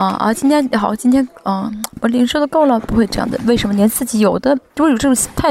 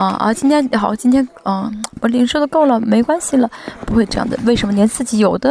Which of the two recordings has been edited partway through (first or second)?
first